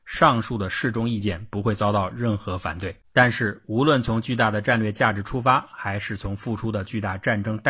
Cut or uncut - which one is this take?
cut